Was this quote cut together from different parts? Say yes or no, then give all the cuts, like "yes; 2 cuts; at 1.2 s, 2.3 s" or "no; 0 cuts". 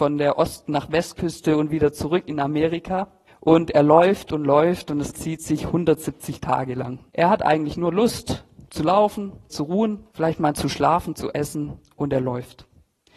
yes; 5 cuts; at 3.3 s, 5.1 s, 7.1 s, 9.5 s, 10.1 s